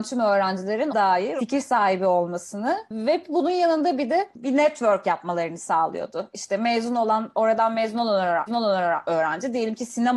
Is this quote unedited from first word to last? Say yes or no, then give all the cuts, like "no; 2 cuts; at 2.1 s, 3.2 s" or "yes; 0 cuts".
no; 2 cuts; at 0.9 s, 8.5 s